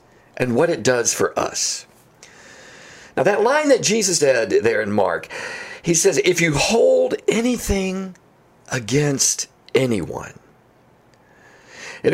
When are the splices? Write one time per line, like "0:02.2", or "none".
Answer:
0:04.2